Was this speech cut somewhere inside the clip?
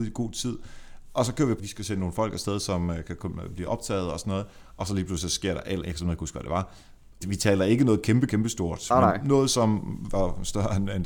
yes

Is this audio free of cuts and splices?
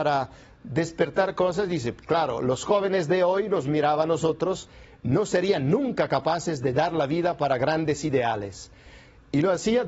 yes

